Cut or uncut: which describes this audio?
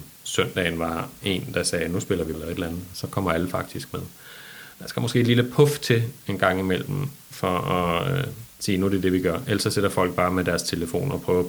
cut